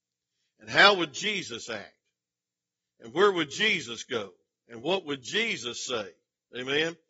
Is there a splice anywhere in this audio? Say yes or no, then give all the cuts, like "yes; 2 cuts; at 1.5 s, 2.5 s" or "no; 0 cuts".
no; 0 cuts